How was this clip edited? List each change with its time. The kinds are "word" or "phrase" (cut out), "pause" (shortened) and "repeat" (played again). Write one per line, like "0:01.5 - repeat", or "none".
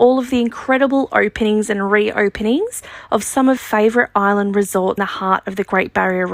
0:03.6 - word
0:05.0 - word

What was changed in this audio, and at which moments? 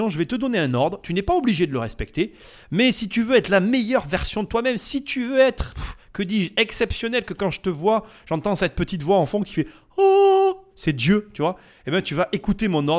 none

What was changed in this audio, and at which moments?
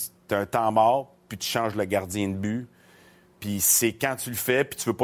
none

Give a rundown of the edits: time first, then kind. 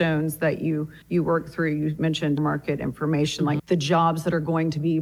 0:01.0 - pause
0:02.4 - word
0:03.6 - phrase

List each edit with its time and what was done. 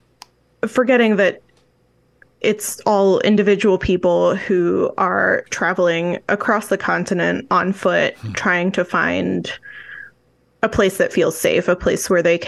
none

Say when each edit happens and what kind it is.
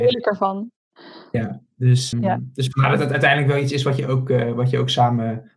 0:02.1 - word

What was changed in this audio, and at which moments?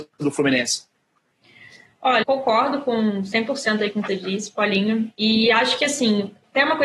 0:02.2 - word
0:04.1 - word

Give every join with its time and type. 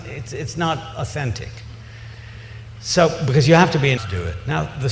0:04.0 - word

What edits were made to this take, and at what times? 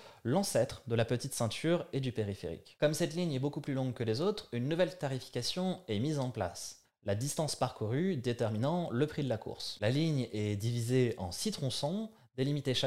none

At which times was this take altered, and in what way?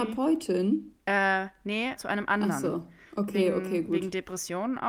0:01.0 - pause
0:02.0 - word

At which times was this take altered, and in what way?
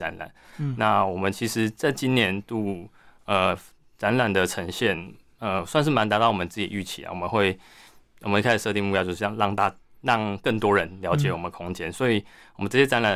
none

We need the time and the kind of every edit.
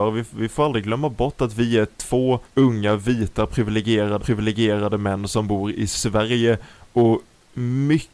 0:02.4 - pause
0:04.2 - repeat

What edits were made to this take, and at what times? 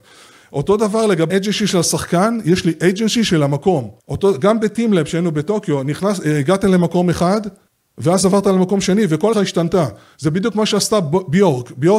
0:01.3 - phrase
0:04.0 - pause
0:07.7 - pause
0:09.3 - phrase

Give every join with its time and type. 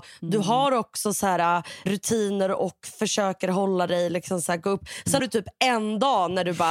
0:01.9 - word
0:05.2 - word

